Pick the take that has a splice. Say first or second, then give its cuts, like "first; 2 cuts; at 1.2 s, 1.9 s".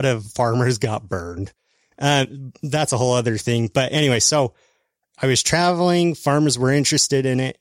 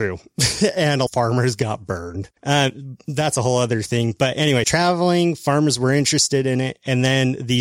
second; 3 cuts; at 1.1 s, 2.4 s, 4.6 s